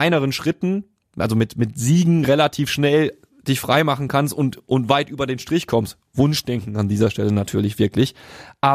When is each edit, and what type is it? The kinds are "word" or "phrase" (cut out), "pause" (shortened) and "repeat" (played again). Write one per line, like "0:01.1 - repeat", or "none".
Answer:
none